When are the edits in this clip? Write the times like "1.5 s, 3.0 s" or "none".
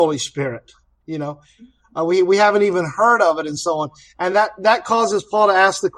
none